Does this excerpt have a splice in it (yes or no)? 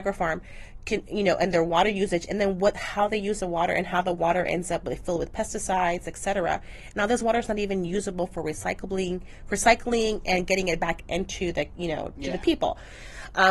no